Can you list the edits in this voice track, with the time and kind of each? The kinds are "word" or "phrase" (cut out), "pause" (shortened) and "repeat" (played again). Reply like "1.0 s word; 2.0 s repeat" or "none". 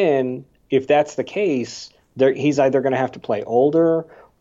none